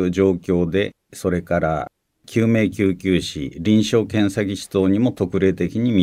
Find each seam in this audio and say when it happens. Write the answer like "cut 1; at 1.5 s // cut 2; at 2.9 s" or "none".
cut 1; at 1.1 s